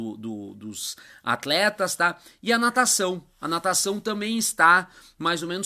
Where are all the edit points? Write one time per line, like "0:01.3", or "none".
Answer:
none